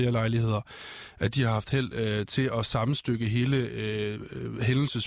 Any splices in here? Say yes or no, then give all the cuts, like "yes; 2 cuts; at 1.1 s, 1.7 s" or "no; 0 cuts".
no; 0 cuts